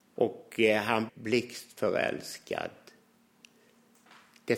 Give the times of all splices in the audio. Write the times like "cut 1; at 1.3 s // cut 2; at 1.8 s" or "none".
cut 1; at 1.1 s